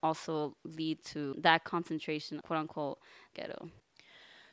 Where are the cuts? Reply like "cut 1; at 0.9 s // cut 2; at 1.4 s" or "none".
cut 1; at 1.3 s // cut 2; at 2.4 s // cut 3; at 3.3 s